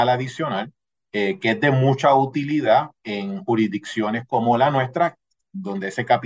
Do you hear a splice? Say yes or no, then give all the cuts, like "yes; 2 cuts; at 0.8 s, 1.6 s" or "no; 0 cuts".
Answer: no; 0 cuts